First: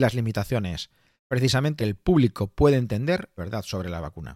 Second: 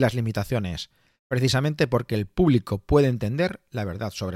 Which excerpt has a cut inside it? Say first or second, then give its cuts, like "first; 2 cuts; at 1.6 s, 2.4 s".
first; 2 cuts; at 1.8 s, 3.4 s